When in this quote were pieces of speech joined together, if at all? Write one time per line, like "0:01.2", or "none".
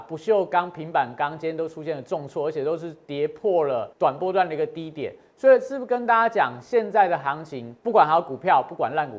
0:03.9
0:07.8